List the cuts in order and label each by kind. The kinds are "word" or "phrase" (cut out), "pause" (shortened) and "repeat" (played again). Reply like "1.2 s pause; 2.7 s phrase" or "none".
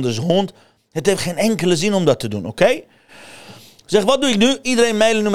none